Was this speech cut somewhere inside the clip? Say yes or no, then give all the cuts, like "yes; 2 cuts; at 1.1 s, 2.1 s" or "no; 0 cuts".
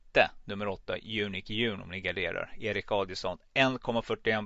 no; 0 cuts